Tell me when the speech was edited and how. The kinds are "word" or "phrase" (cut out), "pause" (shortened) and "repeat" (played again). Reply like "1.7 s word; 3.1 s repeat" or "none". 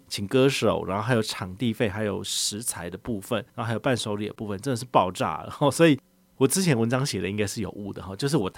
3.5 s pause